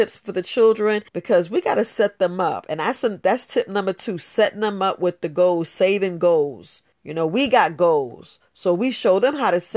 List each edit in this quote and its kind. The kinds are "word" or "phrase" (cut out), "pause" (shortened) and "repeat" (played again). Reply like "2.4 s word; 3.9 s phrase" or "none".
1.1 s pause; 6.9 s pause